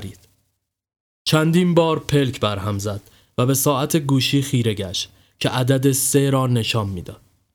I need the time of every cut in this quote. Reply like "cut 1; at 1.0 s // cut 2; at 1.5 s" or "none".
none